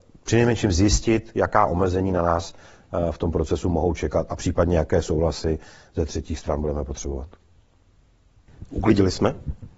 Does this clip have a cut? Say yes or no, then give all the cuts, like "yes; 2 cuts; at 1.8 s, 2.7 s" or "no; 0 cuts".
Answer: no; 0 cuts